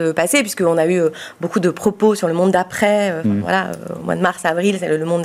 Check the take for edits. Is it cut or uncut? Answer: uncut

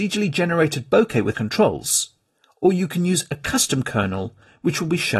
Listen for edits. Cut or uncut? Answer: cut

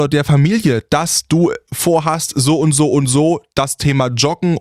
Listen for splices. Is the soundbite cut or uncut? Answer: uncut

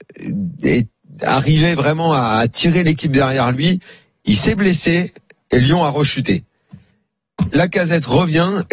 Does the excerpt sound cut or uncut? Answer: uncut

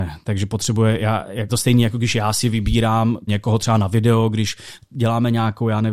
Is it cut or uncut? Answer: cut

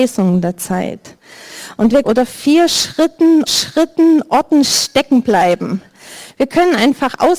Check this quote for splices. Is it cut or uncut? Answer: cut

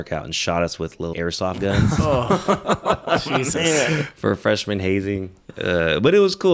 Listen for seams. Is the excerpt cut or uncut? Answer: cut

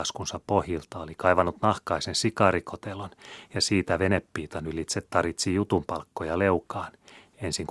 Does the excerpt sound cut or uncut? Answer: uncut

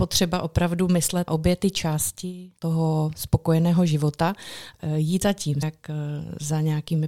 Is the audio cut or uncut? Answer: cut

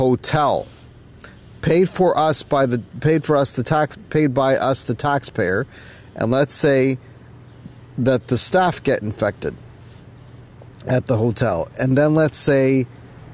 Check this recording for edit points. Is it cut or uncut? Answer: uncut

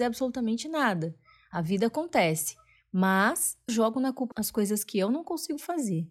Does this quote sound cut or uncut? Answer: cut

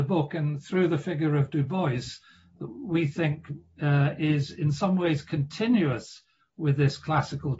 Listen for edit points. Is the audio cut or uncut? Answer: uncut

